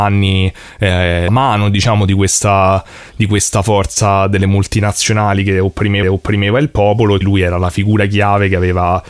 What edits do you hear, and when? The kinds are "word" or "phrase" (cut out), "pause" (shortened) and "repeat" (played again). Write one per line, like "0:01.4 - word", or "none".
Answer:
0:01.3 - word
0:06.0 - repeat
0:07.2 - word